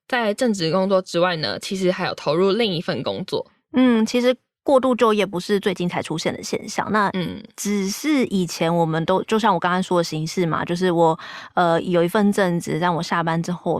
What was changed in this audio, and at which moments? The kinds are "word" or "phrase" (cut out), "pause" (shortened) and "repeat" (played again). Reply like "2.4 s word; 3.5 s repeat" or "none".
none